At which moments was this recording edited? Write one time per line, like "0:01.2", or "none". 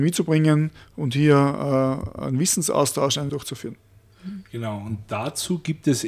0:03.3